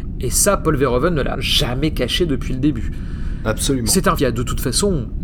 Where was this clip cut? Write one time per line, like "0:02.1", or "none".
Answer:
0:01.3
0:04.2